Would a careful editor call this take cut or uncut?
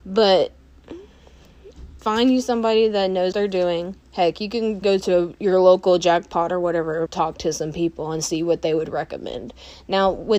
cut